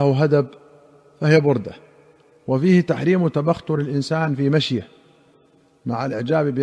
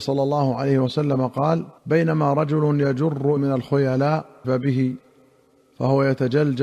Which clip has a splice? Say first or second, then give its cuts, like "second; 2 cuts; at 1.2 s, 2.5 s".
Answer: second; 3 cuts; at 1.8 s, 3.4 s, 4.4 s